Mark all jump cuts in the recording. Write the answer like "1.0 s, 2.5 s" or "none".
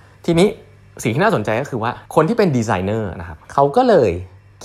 2.1 s, 3.4 s